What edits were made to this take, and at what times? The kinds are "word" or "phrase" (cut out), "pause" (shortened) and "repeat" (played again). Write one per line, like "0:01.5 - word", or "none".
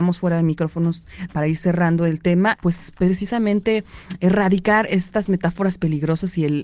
0:01.3 - word
0:02.5 - word